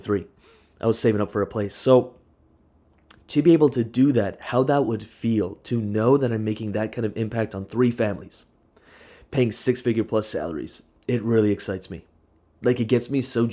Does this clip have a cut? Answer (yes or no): no